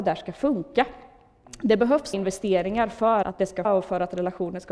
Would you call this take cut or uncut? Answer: cut